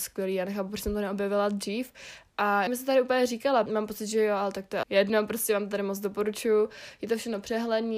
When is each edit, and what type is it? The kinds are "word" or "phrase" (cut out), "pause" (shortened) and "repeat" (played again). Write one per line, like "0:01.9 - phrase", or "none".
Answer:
0:02.7 - word
0:03.7 - word
0:04.8 - word